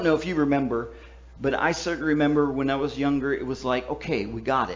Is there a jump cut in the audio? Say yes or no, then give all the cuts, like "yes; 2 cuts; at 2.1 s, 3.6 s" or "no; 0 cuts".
no; 0 cuts